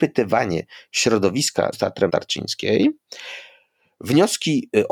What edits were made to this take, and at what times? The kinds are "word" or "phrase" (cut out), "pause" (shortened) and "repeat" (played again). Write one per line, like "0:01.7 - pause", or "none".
0:01.7 - word
0:02.1 - word